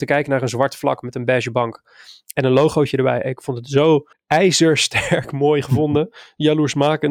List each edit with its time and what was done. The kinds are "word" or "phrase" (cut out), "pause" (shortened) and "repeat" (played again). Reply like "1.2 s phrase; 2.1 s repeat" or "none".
4.1 s pause